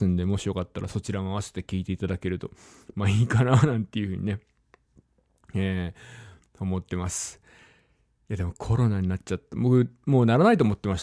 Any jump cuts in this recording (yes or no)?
no